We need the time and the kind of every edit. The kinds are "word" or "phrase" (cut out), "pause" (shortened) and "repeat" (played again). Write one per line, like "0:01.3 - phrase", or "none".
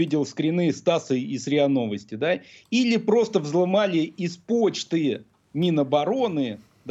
none